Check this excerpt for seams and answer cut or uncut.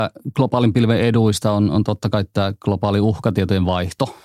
uncut